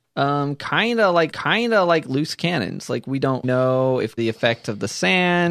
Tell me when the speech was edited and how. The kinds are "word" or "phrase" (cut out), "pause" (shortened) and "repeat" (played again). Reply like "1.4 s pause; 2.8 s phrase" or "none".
1.3 s repeat; 3.4 s word; 4.2 s phrase